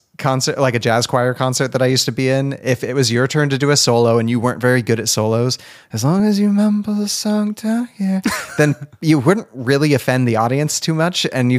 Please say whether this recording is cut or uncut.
uncut